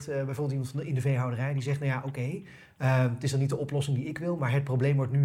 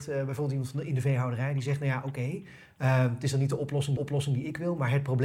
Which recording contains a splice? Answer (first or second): second